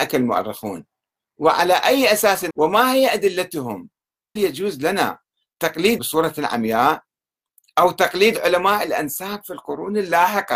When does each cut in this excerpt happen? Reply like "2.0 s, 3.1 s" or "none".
2.5 s, 4.4 s, 6.0 s